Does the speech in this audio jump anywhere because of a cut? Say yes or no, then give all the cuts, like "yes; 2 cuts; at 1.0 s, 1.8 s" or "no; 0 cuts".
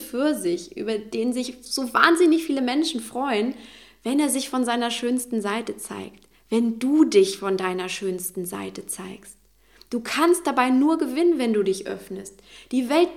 no; 0 cuts